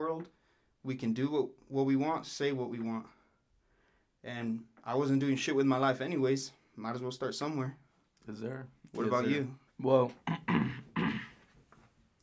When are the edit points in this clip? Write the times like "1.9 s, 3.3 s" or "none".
9.7 s